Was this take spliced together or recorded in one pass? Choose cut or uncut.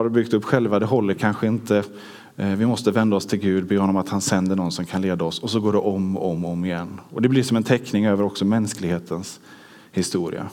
uncut